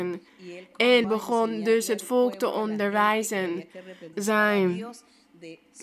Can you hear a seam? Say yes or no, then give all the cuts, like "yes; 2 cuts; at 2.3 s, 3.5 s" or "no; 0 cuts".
yes; 2 cuts; at 1.0 s, 4.1 s